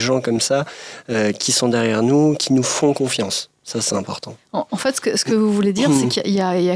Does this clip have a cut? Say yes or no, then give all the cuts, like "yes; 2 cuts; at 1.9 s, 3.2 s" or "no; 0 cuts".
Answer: no; 0 cuts